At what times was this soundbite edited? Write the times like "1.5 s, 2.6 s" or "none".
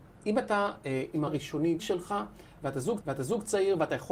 1.3 s, 1.8 s, 3.0 s